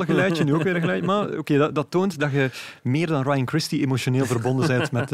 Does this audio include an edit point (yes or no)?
no